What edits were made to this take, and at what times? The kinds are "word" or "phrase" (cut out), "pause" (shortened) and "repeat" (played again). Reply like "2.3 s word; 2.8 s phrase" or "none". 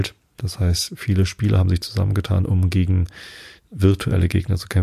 none

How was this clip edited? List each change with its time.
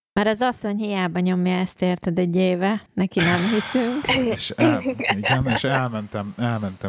2.9 s pause

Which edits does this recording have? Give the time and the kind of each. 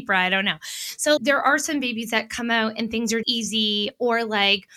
1.2 s phrase; 3.2 s word

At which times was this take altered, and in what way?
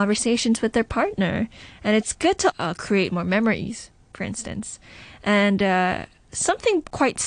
2.5 s word

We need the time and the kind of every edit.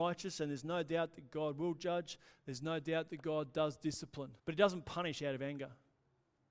4.4 s pause

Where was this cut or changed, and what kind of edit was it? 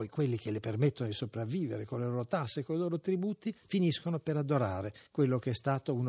3.6 s pause

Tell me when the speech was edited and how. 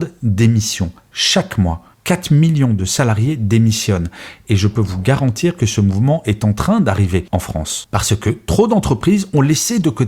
1.9 s pause

